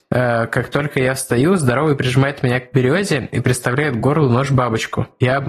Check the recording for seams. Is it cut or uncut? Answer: uncut